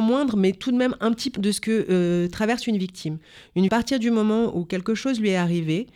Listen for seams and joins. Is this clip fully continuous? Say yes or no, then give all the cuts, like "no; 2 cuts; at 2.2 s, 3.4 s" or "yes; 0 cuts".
no; 2 cuts; at 1.4 s, 3.7 s